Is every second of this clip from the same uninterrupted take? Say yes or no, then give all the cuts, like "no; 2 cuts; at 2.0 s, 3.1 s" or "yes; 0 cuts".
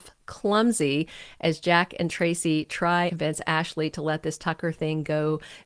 no; 1 cut; at 3.1 s